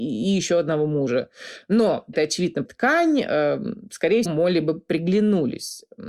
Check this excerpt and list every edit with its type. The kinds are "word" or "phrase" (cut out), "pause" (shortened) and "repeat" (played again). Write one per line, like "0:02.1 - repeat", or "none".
0:02.1 - word
0:02.7 - word
0:04.3 - word